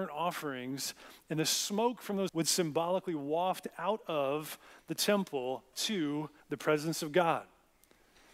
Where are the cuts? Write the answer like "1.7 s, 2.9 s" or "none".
2.3 s, 5.7 s, 6.4 s